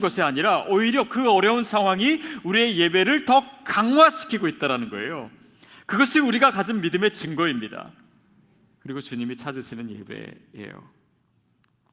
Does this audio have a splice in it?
no; 0 cuts

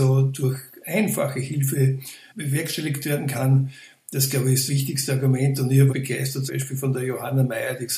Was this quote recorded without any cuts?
no; 4 cuts; at 2.3 s, 4.7 s, 5.9 s, 6.5 s

